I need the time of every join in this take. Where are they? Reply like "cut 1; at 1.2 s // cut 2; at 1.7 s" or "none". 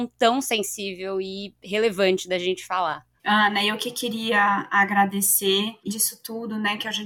cut 1; at 5.9 s